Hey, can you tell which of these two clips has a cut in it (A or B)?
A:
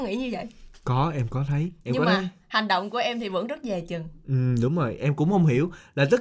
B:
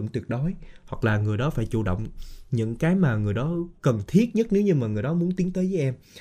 B